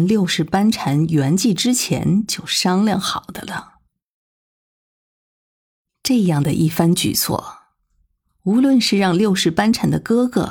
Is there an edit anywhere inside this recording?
no; 0 cuts

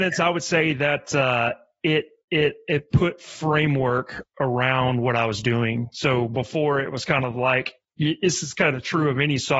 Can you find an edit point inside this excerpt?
no; 0 cuts

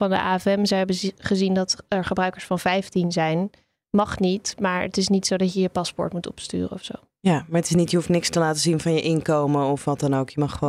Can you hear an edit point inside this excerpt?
no; 0 cuts

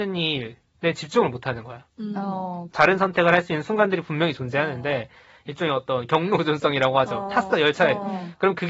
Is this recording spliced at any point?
no; 0 cuts

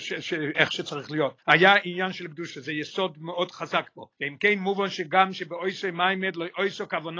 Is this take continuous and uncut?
no; 2 cuts; at 1.4 s, 4.1 s

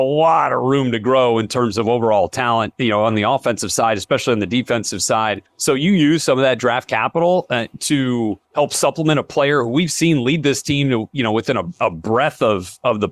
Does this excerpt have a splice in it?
yes; 2 cuts; at 5.5 s, 8.4 s

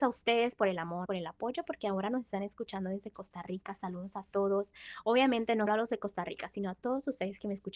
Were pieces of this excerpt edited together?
yes; 2 cuts; at 1.1 s, 5.7 s

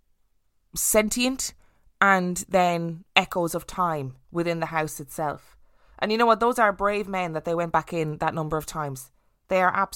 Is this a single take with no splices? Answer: no; 1 cut; at 4.2 s

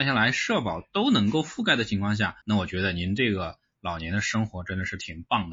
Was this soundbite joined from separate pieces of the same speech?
yes; 1 cut; at 2.4 s

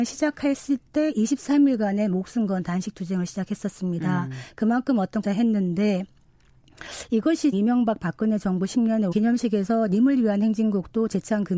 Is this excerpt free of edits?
no; 3 cuts; at 5.2 s, 7.5 s, 9.1 s

